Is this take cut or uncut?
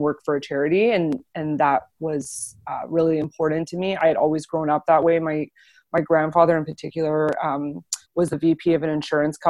cut